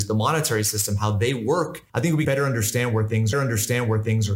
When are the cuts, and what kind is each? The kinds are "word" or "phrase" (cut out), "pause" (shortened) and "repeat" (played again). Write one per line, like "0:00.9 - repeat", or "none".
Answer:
0:01.9 - pause
0:02.2 - word
0:03.3 - repeat